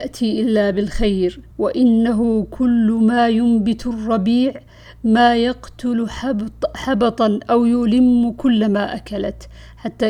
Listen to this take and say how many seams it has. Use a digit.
1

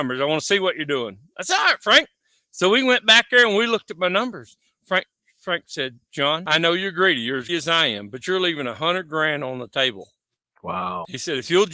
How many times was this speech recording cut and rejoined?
1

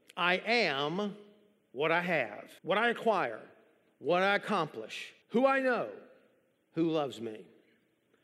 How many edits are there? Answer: 2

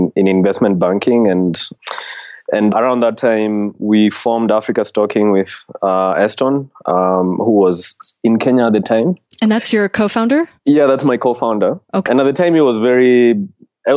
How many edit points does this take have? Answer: 4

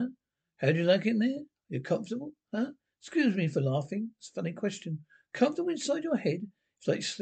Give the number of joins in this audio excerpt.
0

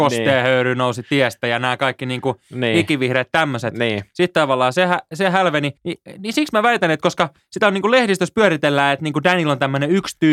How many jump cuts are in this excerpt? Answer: 1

